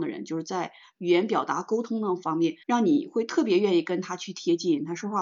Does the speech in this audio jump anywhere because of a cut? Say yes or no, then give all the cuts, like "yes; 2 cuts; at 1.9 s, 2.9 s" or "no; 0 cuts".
yes; 1 cut; at 2.6 s